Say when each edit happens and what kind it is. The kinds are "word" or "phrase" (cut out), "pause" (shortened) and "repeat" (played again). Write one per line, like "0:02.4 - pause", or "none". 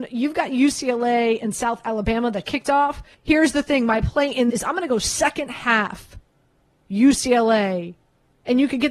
0:02.5 - word
0:03.1 - pause
0:04.5 - word